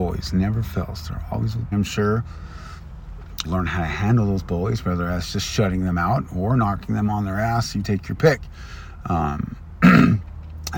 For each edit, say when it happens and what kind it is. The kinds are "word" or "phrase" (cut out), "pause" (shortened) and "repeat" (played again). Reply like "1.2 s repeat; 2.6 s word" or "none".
1.7 s phrase; 3.4 s word